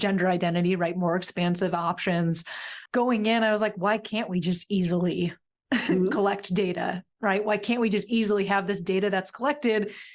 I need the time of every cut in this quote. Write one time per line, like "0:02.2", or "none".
none